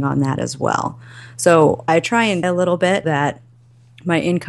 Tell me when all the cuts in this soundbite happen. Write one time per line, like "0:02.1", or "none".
0:01.9
0:02.4
0:03.0